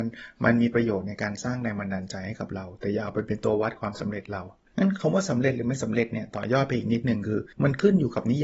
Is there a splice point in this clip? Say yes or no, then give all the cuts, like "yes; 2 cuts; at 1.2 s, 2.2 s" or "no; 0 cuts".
yes; 2 cuts; at 4.7 s, 7.5 s